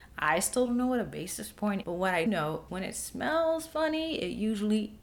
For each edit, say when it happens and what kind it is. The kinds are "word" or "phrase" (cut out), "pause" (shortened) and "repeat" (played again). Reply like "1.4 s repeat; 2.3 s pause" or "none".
1.8 s word; 2.3 s word; 2.7 s word